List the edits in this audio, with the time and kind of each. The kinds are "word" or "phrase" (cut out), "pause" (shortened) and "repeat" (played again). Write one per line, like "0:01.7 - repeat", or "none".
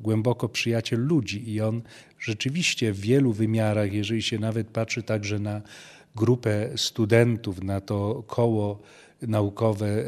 none